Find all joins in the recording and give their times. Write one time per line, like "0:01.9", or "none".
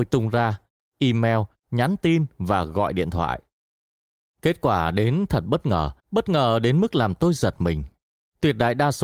0:06.0